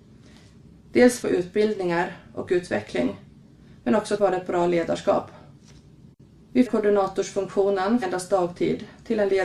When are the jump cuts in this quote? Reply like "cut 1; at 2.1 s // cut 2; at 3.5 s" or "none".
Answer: cut 1; at 1.2 s // cut 2; at 4.2 s // cut 3; at 6.7 s // cut 4; at 8.0 s